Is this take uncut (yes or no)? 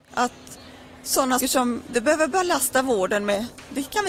no